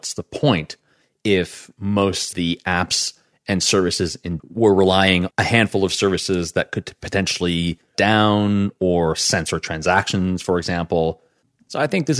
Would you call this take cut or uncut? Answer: cut